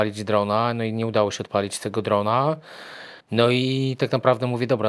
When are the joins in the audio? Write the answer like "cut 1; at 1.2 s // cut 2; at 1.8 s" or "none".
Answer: cut 1; at 3.2 s